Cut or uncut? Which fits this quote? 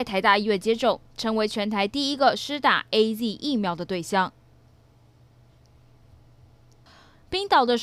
uncut